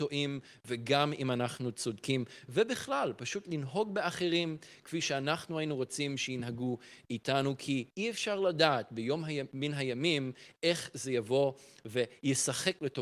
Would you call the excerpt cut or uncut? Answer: uncut